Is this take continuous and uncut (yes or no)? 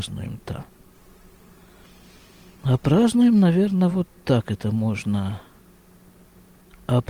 yes